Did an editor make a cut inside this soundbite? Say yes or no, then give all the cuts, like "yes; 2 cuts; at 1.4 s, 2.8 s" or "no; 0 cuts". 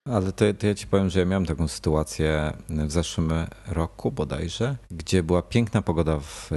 yes; 1 cut; at 4.8 s